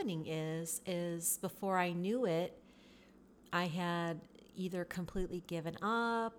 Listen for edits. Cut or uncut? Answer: uncut